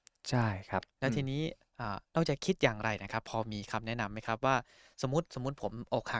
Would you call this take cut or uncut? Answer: cut